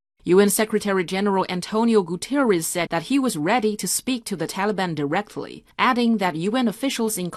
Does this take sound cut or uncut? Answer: cut